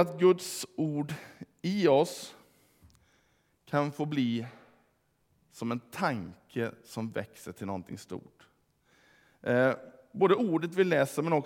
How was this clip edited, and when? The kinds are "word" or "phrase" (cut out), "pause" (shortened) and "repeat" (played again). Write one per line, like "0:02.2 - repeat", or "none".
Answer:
none